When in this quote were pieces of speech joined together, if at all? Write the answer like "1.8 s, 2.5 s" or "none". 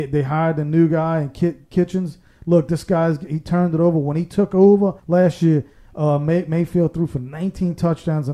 5.0 s